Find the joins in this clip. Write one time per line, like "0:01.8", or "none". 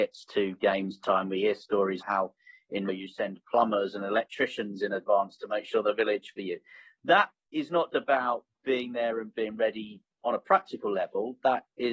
0:02.0
0:02.9
0:06.3
0:07.9

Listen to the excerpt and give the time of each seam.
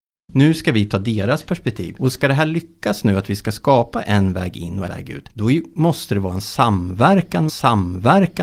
0:04.9
0:07.5

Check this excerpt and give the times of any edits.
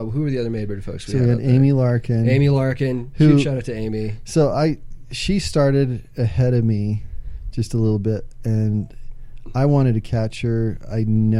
none

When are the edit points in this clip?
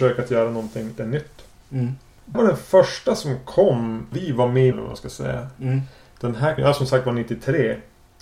0:01.0
0:02.3
0:04.1
0:04.7
0:06.6

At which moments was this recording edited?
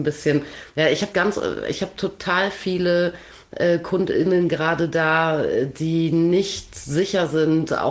0:01.1

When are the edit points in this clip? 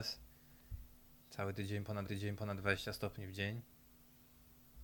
0:02.1

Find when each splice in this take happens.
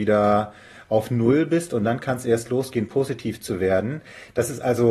none

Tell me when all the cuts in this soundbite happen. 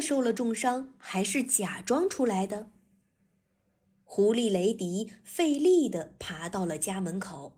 none

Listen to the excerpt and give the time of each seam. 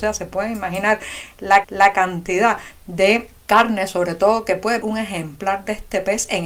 0:01.6
0:03.4
0:04.8

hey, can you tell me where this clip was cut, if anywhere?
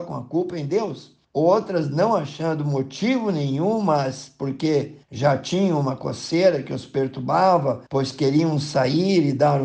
0:01.2
0:05.0
0:07.9

